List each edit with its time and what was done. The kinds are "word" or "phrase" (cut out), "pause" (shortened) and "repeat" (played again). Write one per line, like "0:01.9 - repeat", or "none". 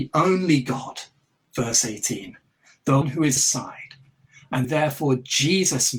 0:03.0 - word
0:03.4 - phrase
0:04.6 - word